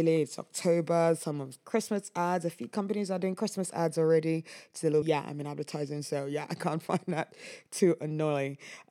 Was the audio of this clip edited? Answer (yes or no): yes